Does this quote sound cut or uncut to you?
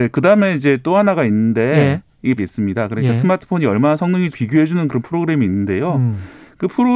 cut